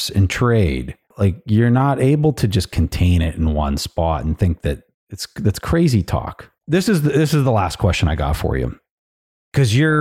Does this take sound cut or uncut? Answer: cut